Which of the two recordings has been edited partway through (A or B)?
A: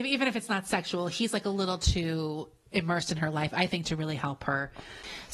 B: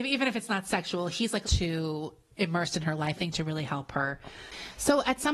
B